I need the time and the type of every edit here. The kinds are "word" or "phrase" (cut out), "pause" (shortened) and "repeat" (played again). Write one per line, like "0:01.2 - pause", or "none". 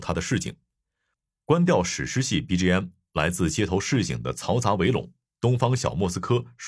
none